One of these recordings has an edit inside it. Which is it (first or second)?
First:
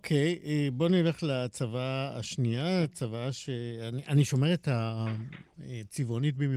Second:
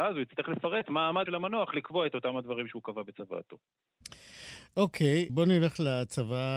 second